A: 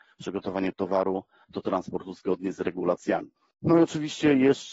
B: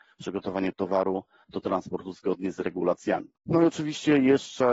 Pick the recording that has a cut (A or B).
B